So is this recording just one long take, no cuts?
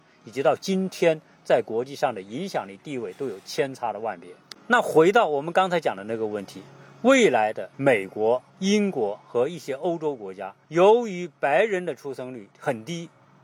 no; 5 cuts; at 4.6 s, 7.7 s, 8.5 s, 10.6 s, 12.5 s

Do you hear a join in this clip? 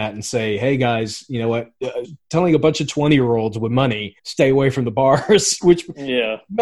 yes; 2 cuts; at 2.0 s, 4.2 s

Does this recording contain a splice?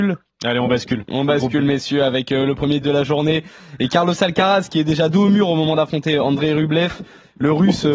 yes; 1 cut; at 2.8 s

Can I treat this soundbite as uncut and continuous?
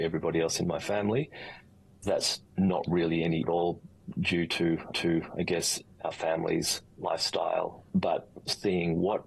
no; 4 cuts; at 2.5 s, 3.4 s, 4.9 s, 7.9 s

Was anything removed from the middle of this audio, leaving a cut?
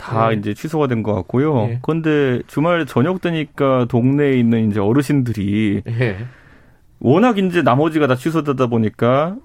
no; 0 cuts

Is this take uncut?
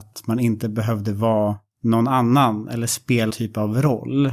no; 1 cut; at 3.3 s

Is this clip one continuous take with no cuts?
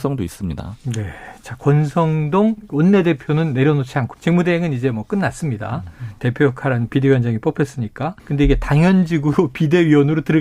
no; 3 cuts; at 2.7 s, 4.1 s, 8.2 s

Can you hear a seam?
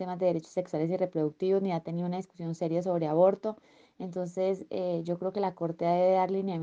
no; 0 cuts

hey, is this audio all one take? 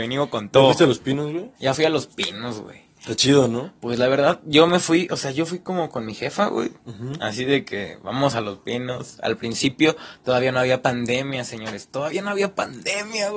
no; 1 cut; at 1.6 s

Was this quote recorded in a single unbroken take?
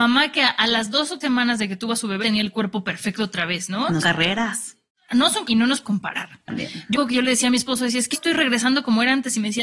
no; 8 cuts; at 1.2 s, 2.2 s, 4.0 s, 5.4 s, 5.8 s, 6.5 s, 6.9 s, 8.1 s

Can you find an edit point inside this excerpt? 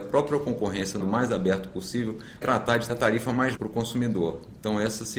yes; 4 cuts; at 1.0 s, 2.4 s, 2.9 s, 3.6 s

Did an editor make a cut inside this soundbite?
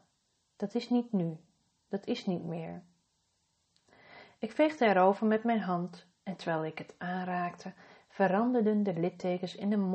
no; 0 cuts

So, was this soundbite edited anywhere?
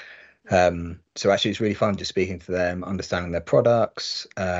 yes; 1 cut; at 1.1 s

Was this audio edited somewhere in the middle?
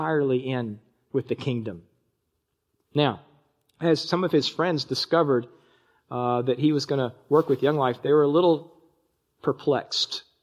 no; 0 cuts

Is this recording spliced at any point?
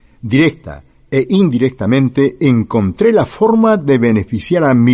no; 0 cuts

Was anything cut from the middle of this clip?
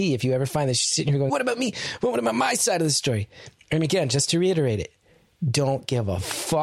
yes; 1 cut; at 1.3 s

